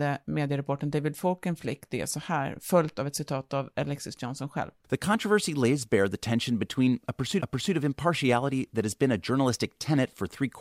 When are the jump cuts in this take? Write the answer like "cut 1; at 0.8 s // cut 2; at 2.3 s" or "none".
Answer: cut 1; at 4.8 s // cut 2; at 7.4 s